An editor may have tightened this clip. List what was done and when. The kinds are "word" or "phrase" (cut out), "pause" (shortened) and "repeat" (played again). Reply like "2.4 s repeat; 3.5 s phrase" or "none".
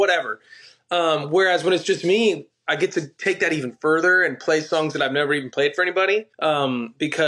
6.3 s pause

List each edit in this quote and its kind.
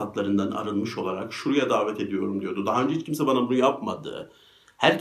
none

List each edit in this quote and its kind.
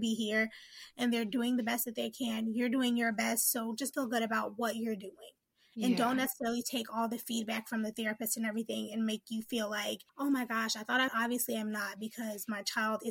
3.9 s word; 10.1 s pause; 11.1 s phrase

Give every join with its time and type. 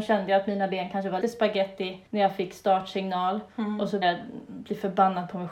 1.2 s word; 2.1 s pause; 3.5 s pause; 4.0 s word

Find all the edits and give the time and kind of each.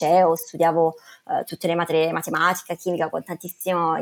none

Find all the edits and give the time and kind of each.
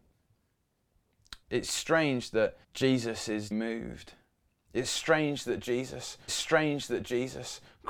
1.4 s pause; 2.6 s pause; 3.5 s word; 6.3 s repeat

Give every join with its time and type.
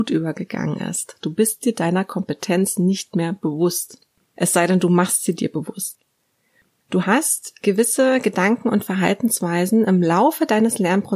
none

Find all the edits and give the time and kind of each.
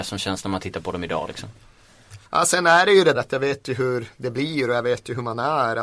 2.2 s pause; 3.1 s word

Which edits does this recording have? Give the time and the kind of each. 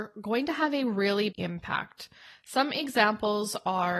1.3 s word

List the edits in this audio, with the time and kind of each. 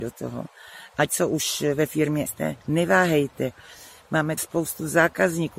1.1 s word; 2.3 s word; 2.6 s pause; 4.4 s word

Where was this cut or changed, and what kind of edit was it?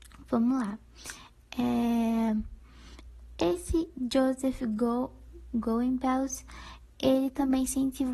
none

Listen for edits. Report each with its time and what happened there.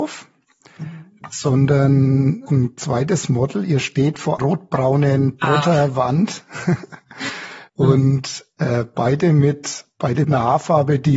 2.5 s word; 4.4 s word; 7.7 s pause; 10.2 s word

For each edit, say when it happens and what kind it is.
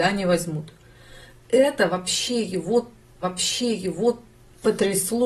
3.2 s repeat

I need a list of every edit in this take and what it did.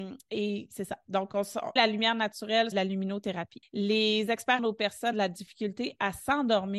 1.8 s word; 2.7 s word; 3.6 s pause; 4.6 s phrase; 5.1 s word

